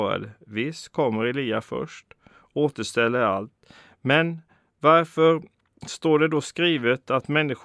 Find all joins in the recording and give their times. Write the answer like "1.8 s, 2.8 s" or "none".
none